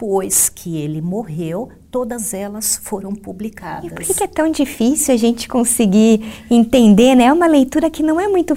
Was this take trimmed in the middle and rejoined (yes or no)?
no